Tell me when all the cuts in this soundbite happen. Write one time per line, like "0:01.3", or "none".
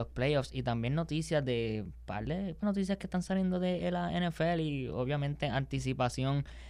0:02.6